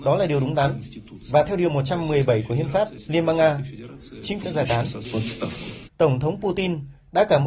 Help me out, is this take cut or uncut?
cut